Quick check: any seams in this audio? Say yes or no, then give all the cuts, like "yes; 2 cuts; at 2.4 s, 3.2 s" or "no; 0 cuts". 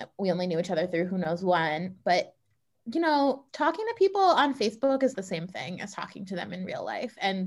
yes; 2 cuts; at 3.5 s, 5.1 s